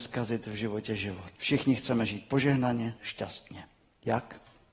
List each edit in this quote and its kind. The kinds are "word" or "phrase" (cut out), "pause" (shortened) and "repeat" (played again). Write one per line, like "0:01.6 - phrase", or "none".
0:01.4 - pause
0:03.0 - word

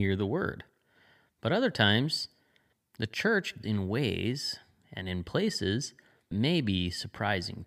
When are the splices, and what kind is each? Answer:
0:03.6 - word
0:06.3 - word

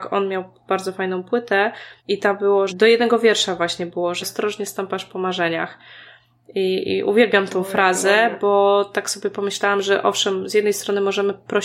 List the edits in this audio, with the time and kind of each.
0:02.0 - pause
0:02.7 - word
0:04.2 - word

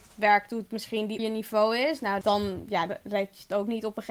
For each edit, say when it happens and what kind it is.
0:01.2 - word
0:02.2 - word
0:02.9 - word

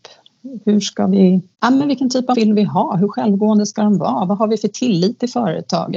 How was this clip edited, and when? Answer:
0:01.5 - pause
0:02.3 - word

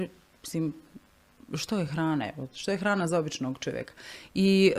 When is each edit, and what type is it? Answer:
none

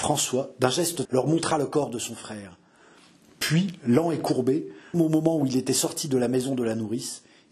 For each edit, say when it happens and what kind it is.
0:01.0 - word
0:04.9 - word

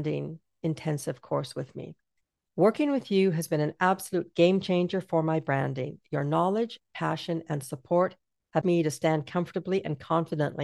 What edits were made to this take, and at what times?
0:02.2 - pause
0:08.6 - word

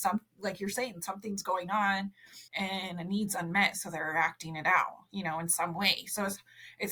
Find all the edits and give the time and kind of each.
0:02.5 - pause

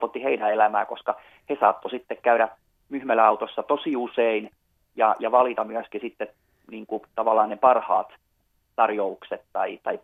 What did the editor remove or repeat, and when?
none

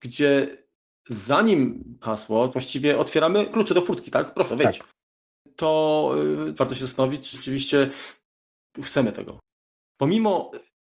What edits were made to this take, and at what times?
0:02.0 - word
0:02.5 - word
0:03.5 - word
0:04.5 - word
0:06.6 - word
0:07.3 - word

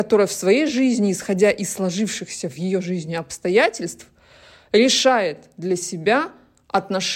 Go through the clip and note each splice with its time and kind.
none

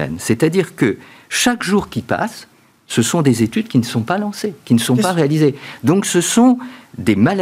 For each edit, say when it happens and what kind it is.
none

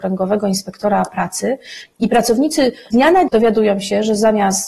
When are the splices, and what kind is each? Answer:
0:02.9 - word
0:03.3 - word

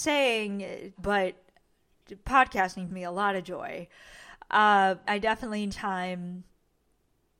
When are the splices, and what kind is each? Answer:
0:00.9 - word
0:02.9 - word
0:05.0 - word
0:05.7 - word

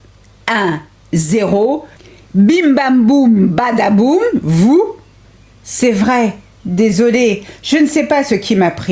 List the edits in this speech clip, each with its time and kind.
none

